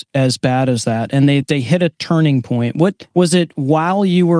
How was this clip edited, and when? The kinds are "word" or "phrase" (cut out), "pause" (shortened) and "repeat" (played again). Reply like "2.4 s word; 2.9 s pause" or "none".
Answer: 1.4 s word; 3.1 s pause